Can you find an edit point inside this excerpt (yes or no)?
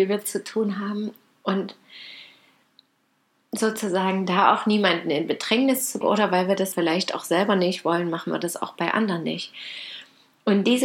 yes